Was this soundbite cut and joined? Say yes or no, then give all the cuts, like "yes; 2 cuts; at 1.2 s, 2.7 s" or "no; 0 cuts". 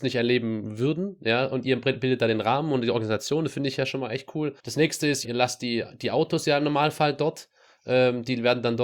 yes; 2 cuts; at 4.6 s, 5.2 s